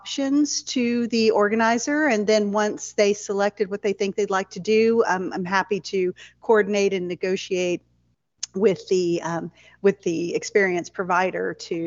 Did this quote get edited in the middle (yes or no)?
no